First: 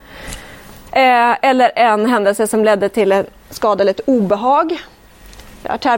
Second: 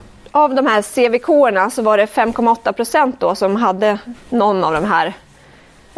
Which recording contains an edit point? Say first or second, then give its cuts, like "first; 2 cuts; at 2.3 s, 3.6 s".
second; 1 cut; at 4.2 s